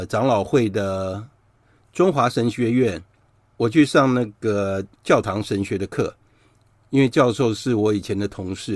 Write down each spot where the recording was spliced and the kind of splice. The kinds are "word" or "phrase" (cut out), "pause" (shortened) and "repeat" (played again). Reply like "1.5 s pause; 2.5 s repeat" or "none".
5.0 s pause